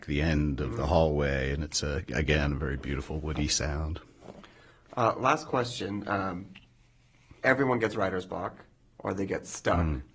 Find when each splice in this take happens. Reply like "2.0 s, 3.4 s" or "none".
none